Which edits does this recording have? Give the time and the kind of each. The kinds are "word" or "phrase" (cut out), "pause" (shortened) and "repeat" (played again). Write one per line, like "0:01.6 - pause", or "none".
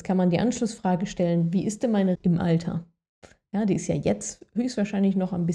0:02.2 - word